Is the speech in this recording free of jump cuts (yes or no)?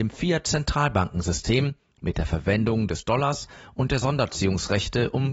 yes